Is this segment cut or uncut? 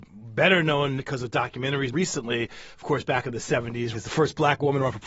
cut